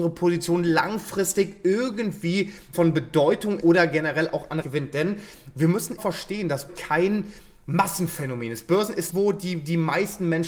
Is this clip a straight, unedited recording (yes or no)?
no